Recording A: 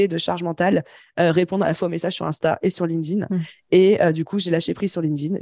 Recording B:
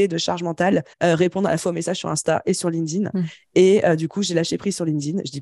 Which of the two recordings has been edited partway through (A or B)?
B